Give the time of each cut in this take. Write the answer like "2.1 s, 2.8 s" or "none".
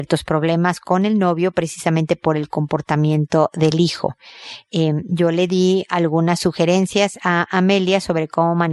none